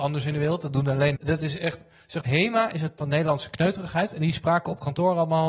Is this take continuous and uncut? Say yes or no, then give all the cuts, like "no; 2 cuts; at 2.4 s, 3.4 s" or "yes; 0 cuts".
no; 3 cuts; at 1.2 s, 2.2 s, 3.0 s